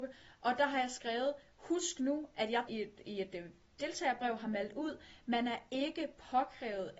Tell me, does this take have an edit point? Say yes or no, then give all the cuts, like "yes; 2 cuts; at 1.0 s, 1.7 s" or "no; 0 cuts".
yes; 1 cut; at 2.7 s